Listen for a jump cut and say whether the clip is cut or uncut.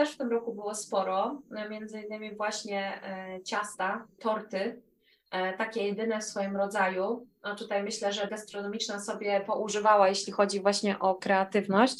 cut